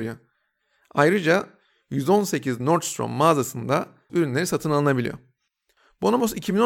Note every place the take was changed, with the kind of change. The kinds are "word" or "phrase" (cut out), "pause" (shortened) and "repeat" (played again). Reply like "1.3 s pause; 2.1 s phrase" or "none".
4.1 s word

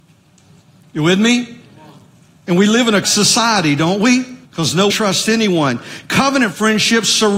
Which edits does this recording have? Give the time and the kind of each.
3.0 s word; 4.4 s pause; 4.9 s word

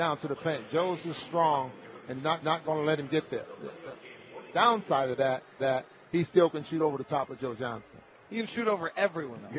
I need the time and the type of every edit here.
1.0 s word; 2.4 s repeat; 5.6 s repeat

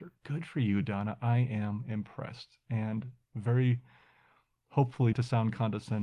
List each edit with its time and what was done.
5.1 s word

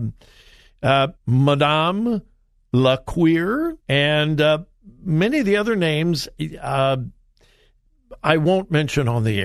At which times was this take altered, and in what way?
1.1 s pause; 3.8 s pause

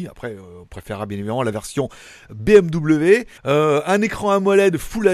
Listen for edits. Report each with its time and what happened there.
3.4 s pause

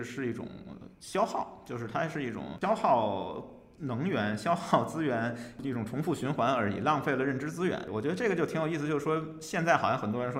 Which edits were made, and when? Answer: 0.9 s pause

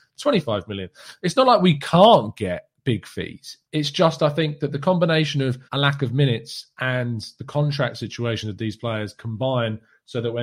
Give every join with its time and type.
2.8 s pause; 3.6 s pause; 5.7 s pause

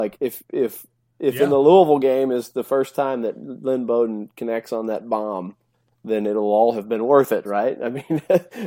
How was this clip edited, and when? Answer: none

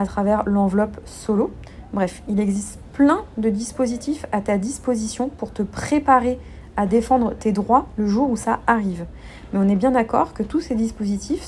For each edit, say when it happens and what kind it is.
none

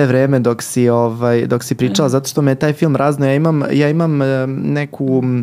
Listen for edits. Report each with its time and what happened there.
none

